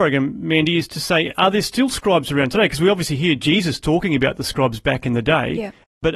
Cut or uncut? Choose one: uncut